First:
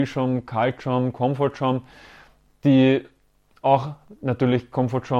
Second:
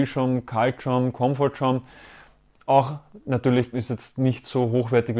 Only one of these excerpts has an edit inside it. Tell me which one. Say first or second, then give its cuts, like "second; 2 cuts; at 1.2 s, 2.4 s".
second; 2 cuts; at 2.5 s, 3.7 s